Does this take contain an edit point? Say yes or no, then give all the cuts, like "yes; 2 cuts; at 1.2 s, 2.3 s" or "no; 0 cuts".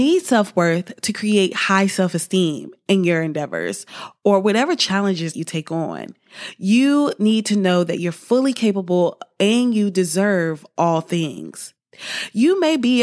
yes; 1 cut; at 5.3 s